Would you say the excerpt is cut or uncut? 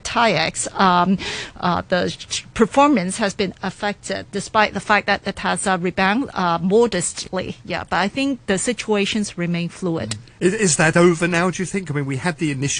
uncut